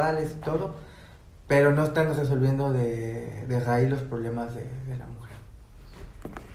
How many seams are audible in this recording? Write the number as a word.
zero